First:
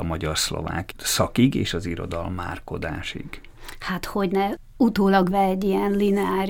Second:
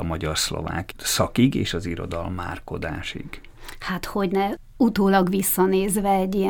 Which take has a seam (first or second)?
first